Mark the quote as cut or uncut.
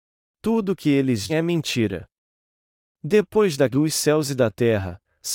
cut